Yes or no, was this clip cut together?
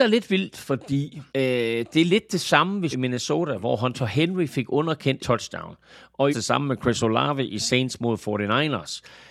yes